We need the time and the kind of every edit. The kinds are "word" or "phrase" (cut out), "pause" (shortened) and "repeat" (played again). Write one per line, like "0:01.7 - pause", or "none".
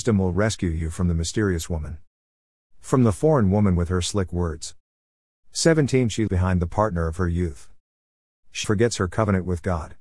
0:06.3 - word
0:08.6 - word